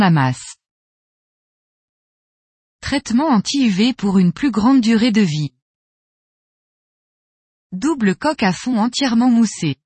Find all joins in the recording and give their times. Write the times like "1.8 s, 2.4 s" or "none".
none